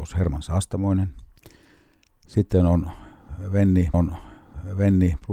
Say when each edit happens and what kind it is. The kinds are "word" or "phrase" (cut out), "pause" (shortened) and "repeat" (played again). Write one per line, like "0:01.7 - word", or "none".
0:03.9 - repeat